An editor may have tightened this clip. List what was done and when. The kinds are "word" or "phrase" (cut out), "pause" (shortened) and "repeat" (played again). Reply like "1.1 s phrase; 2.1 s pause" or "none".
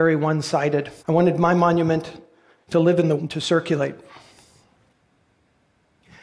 1.0 s pause; 3.2 s word